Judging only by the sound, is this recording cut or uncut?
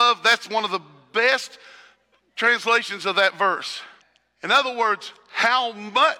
cut